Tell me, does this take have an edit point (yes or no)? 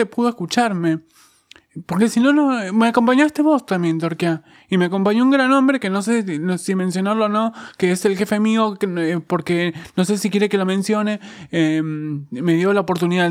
no